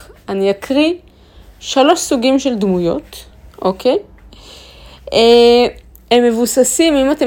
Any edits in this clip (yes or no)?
no